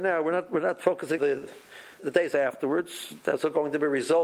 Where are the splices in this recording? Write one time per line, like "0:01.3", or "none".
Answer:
0:01.2
0:02.0
0:02.3